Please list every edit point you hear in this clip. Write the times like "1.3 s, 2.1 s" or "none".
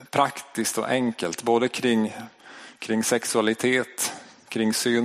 none